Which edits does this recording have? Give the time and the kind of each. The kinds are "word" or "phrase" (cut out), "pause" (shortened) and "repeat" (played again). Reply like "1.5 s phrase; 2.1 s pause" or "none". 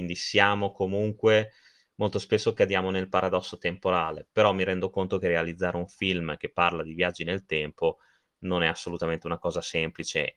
none